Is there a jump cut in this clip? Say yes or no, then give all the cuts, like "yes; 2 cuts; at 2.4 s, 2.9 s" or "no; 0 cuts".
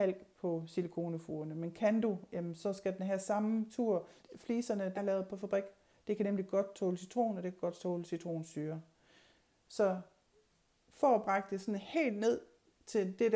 yes; 2 cuts; at 4.2 s, 5.0 s